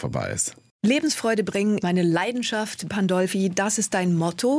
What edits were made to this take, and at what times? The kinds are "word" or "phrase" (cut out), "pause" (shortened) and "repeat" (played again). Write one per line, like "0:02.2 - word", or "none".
0:01.8 - word
0:02.9 - word